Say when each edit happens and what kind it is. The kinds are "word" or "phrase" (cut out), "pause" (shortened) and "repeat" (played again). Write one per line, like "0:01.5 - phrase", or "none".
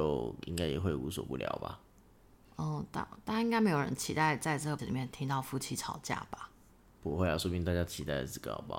0:04.8 - word